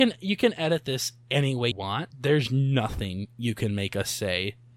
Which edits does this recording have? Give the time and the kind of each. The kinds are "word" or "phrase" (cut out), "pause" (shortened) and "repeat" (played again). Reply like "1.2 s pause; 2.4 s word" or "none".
1.7 s word; 2.1 s word